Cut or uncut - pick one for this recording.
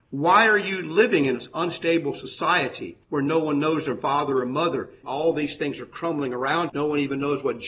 cut